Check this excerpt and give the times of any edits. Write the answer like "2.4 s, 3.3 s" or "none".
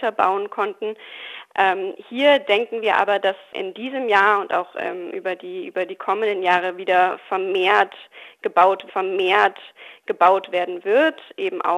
8.9 s